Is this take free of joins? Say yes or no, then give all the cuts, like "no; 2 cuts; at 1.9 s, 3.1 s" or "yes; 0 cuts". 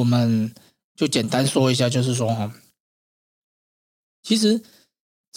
yes; 0 cuts